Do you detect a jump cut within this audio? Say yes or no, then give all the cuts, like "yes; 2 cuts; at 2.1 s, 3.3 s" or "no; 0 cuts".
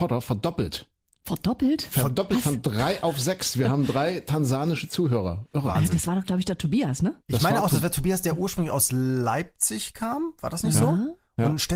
yes; 1 cut; at 7.2 s